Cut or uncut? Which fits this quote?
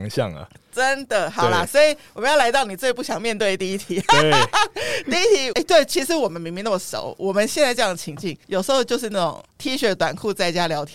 cut